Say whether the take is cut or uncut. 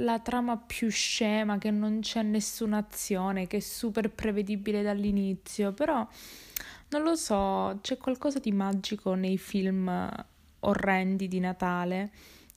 uncut